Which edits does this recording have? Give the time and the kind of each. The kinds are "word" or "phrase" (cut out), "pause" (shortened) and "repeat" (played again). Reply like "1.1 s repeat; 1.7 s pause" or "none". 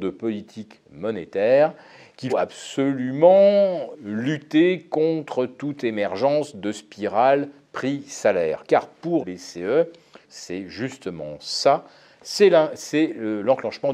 2.3 s word; 3.9 s word; 9.2 s word; 10.2 s word